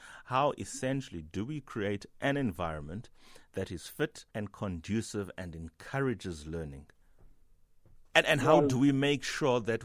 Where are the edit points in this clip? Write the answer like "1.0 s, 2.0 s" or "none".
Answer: 4.3 s, 8.1 s

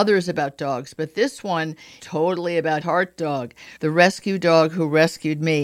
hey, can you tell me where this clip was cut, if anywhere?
2.0 s, 2.8 s, 3.8 s

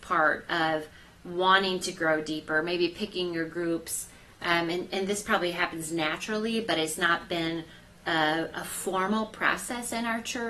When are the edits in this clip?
none

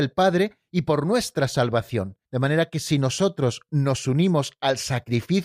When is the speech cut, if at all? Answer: 2.2 s

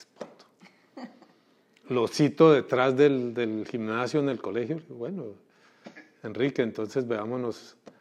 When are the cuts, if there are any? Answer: none

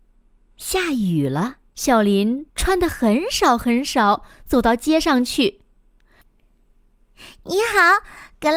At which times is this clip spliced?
1.7 s, 2.5 s

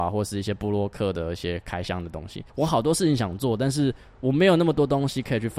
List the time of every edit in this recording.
2.5 s

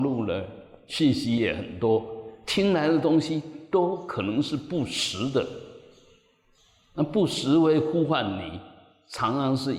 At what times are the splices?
none

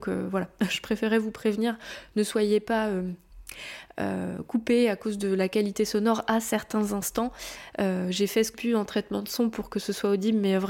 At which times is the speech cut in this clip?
8.5 s

